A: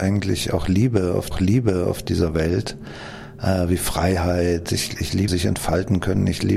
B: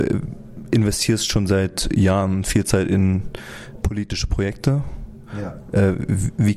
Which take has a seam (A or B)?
A